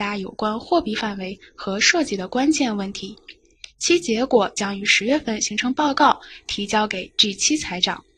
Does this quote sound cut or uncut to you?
uncut